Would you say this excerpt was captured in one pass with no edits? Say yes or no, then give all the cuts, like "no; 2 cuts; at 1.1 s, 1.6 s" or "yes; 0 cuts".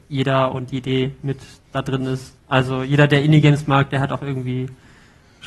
no; 1 cut; at 2.4 s